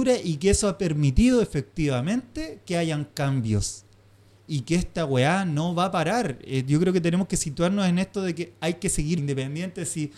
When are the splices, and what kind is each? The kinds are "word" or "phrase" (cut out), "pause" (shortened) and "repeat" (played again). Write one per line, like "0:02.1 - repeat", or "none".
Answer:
0:09.2 - word